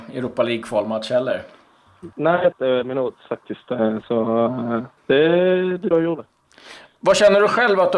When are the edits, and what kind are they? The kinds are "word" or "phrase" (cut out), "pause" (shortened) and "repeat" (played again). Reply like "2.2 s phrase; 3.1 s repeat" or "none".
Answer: 2.1 s pause; 2.5 s phrase; 5.0 s pause; 5.9 s word